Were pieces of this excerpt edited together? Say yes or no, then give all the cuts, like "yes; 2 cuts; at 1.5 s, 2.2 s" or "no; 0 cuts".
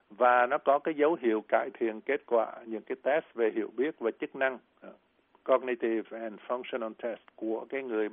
no; 0 cuts